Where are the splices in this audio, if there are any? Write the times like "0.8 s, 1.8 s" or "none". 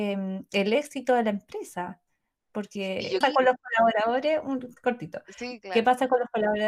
3.2 s